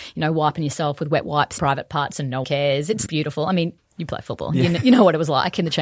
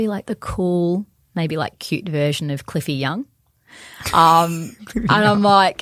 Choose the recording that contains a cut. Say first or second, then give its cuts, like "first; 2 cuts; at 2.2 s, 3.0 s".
first; 4 cuts; at 1.6 s, 2.4 s, 3.1 s, 3.8 s